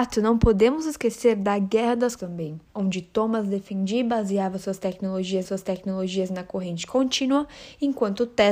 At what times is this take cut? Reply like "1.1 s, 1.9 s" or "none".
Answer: 2.2 s, 2.7 s, 5.4 s

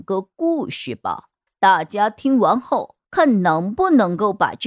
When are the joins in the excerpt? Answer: 1.5 s, 3.0 s

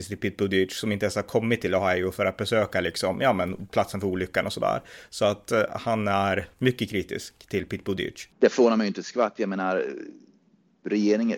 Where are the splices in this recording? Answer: 8.3 s

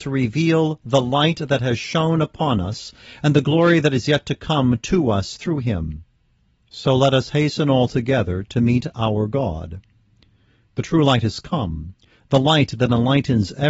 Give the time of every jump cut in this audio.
none

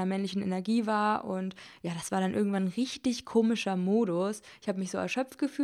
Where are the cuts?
none

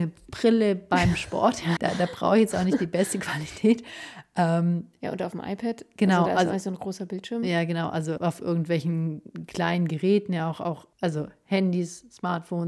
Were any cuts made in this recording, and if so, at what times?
1.8 s, 8.2 s, 10.9 s

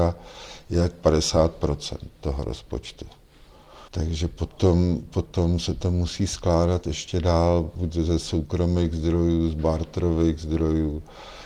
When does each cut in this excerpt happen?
3.9 s

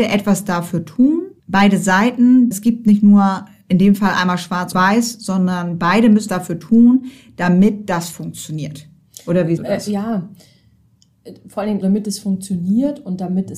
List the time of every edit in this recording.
1.4 s, 2.5 s, 4.7 s, 6.3 s, 9.6 s, 11.8 s

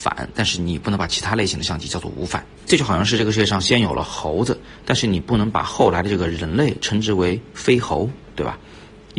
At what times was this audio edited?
2.5 s

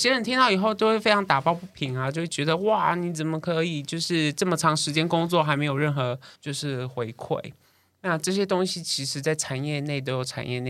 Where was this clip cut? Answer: 6.4 s

